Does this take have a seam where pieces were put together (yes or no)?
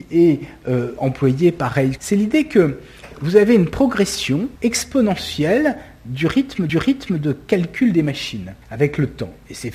yes